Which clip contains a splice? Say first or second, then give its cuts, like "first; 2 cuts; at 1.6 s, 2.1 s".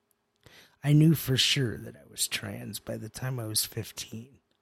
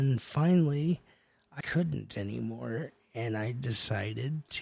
second; 1 cut; at 1.6 s